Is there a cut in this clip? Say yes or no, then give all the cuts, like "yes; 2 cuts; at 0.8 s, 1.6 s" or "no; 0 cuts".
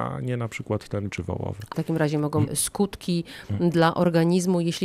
yes; 3 cuts; at 1.1 s, 1.7 s, 2.5 s